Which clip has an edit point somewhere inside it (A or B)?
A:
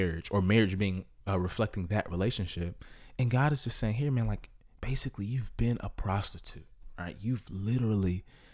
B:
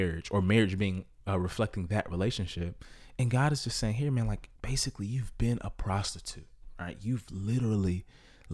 B